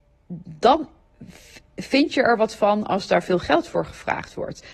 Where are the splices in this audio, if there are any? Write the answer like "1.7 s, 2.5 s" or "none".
none